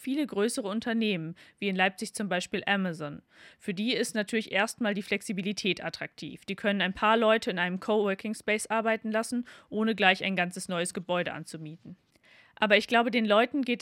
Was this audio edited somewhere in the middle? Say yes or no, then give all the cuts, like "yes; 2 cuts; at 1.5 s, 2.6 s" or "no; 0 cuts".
no; 0 cuts